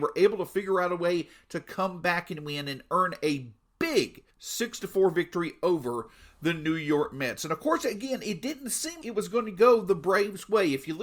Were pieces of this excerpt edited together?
yes; 2 cuts; at 4.3 s, 9.0 s

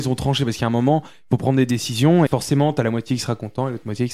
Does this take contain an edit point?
yes; 1 cut; at 2.3 s

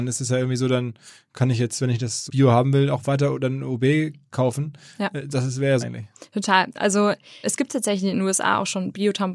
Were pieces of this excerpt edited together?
yes; 3 cuts; at 2.3 s, 5.8 s, 7.4 s

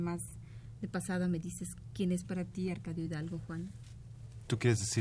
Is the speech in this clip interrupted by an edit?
no; 0 cuts

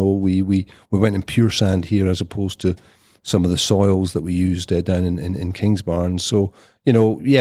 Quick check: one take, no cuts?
yes; 0 cuts

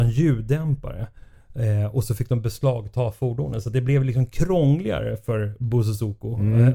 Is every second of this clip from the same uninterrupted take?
yes; 0 cuts

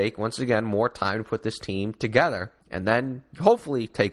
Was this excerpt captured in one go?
no; 1 cut; at 2.6 s

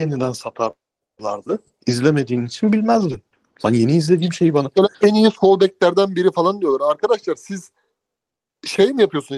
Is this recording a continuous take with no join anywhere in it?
no; 1 cut; at 4.9 s

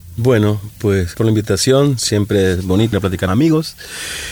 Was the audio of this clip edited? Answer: yes; 3 cuts; at 1.1 s, 2.9 s, 3.3 s

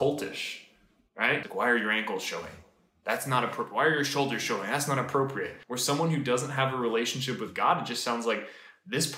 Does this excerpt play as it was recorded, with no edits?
yes; 0 cuts

